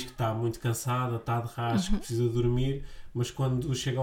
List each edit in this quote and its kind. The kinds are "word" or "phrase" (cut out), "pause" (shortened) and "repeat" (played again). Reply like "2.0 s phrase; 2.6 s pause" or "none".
none